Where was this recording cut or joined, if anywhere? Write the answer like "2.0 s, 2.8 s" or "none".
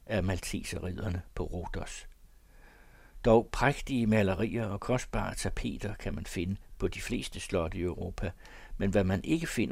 none